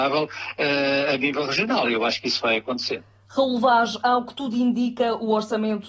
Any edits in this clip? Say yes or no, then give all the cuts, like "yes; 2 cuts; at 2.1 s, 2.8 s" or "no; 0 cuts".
no; 0 cuts